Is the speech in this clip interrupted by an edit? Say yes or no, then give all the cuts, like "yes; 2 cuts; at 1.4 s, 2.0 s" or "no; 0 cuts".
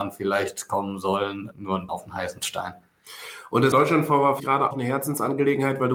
yes; 5 cuts; at 1.5 s, 1.9 s, 3.7 s, 4.4 s, 4.7 s